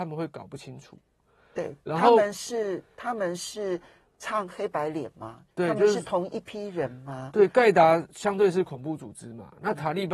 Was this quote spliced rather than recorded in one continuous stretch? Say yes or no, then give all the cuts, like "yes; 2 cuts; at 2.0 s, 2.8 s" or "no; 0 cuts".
no; 0 cuts